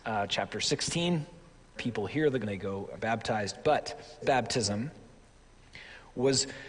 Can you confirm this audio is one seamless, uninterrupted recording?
no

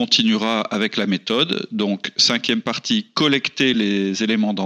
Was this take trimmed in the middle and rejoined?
no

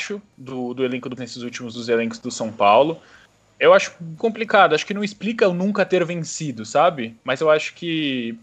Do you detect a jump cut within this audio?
yes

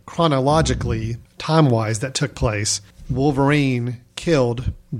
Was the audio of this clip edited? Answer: no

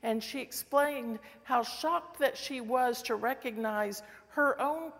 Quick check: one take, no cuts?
yes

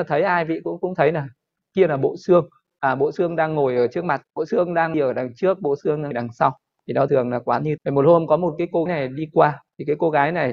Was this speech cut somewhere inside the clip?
yes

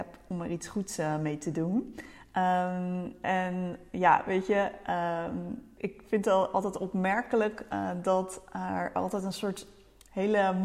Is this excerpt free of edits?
no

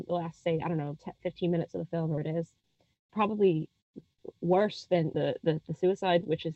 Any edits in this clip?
yes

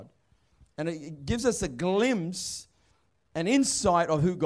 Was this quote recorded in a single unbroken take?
yes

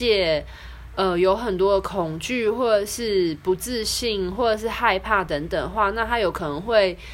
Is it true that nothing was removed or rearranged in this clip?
yes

